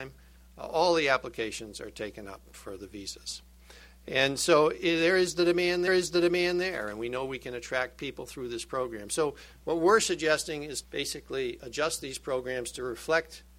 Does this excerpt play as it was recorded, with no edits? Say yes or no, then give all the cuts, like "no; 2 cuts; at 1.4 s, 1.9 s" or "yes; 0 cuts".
no; 2 cuts; at 5.9 s, 10.8 s